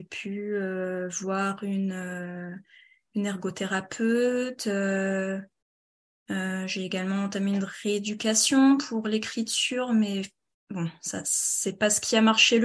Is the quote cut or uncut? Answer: uncut